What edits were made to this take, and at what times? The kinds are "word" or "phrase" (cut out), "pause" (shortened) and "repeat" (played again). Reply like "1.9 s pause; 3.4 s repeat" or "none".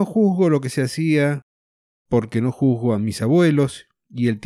none